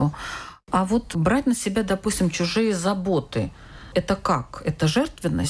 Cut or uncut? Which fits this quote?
uncut